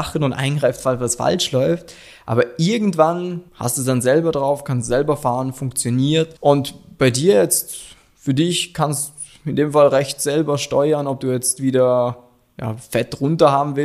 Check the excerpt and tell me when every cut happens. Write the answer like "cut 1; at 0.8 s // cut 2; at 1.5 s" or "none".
cut 1; at 3.5 s // cut 2; at 6.4 s

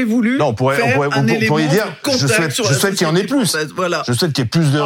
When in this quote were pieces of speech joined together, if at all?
none

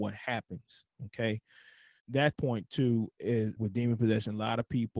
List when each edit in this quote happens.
cut 1; at 2.0 s // cut 2; at 2.3 s // cut 3; at 3.6 s

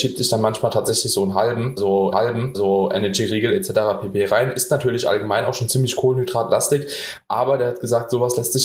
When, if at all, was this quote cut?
cut 1; at 2.1 s

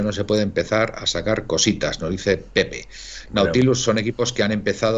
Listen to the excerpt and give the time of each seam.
none

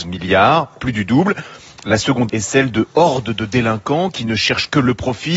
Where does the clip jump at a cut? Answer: cut 1; at 2.3 s

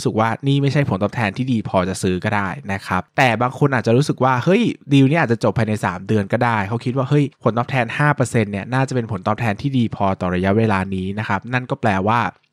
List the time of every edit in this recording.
none

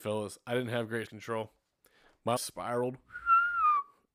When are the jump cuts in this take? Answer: cut 1; at 1.1 s // cut 2; at 2.4 s

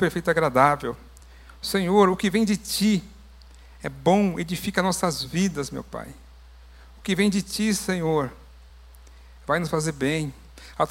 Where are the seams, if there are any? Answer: none

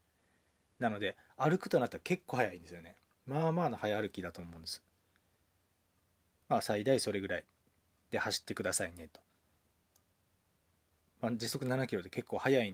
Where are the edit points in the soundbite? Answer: none

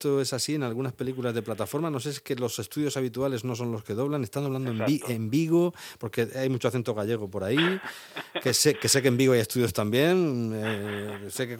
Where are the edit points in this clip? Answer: none

